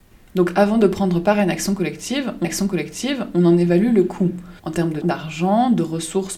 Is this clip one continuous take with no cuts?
no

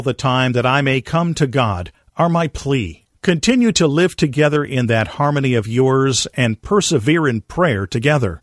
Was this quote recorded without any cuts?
no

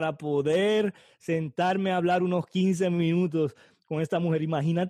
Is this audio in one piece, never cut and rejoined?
yes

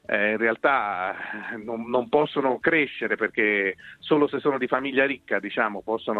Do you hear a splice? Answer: no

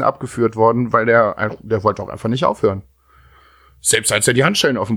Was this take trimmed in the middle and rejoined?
no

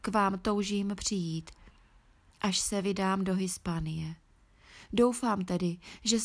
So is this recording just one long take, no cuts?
yes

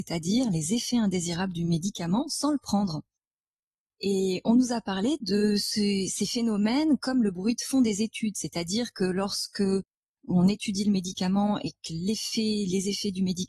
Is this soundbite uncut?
yes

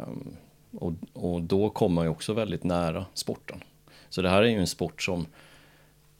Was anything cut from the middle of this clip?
no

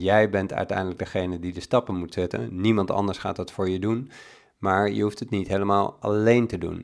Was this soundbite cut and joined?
no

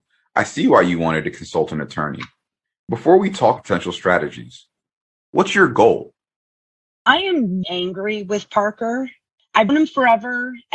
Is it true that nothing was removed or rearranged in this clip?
no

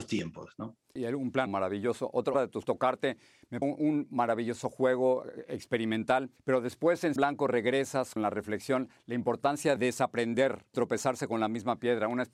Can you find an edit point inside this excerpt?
yes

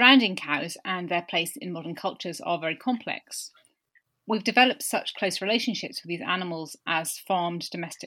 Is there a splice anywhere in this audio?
no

